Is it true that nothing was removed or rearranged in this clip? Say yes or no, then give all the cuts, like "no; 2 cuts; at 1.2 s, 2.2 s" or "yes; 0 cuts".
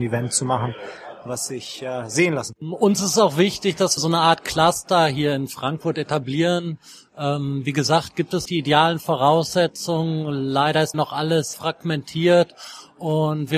no; 4 cuts; at 4.0 s, 8.4 s, 10.9 s, 11.5 s